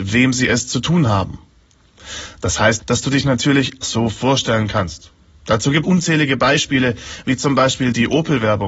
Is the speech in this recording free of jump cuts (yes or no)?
no